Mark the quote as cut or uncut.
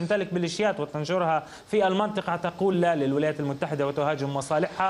uncut